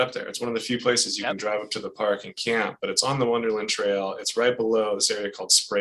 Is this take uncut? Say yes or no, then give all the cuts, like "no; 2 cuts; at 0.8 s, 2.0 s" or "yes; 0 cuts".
yes; 0 cuts